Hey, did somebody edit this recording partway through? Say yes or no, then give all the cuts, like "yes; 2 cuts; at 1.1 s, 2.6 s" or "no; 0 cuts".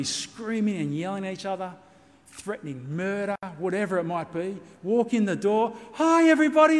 no; 0 cuts